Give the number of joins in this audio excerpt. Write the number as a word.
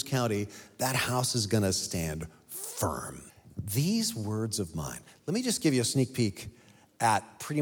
one